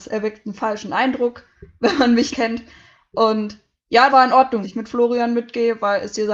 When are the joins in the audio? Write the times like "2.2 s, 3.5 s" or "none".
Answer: 2.3 s, 4.1 s, 4.6 s

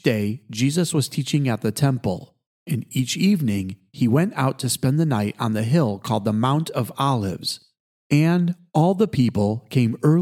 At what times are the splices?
none

